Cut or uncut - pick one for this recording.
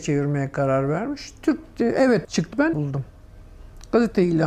cut